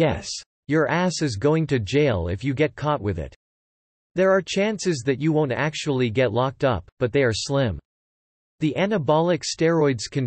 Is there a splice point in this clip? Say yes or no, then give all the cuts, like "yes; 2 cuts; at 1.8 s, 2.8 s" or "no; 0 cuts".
no; 0 cuts